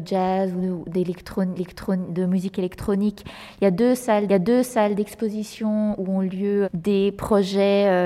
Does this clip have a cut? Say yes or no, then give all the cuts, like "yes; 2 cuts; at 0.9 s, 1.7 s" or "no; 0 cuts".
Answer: yes; 3 cuts; at 1.6 s, 4.3 s, 6.6 s